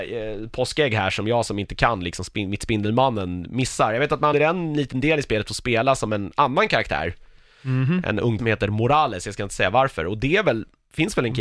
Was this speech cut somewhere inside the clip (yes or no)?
yes